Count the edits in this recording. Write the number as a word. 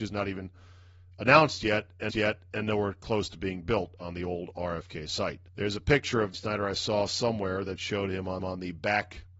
four